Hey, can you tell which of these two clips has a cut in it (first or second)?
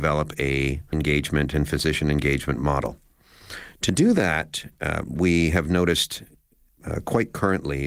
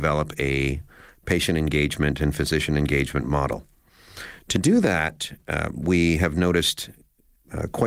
first